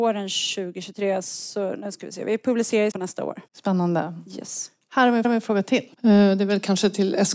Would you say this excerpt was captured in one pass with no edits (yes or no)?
no